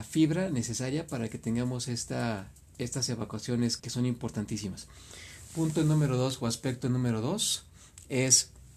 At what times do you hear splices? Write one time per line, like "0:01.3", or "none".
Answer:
0:03.8